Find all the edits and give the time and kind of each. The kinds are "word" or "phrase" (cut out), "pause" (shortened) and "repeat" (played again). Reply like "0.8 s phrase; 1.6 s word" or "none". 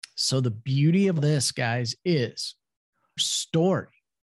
1.2 s word; 3.2 s word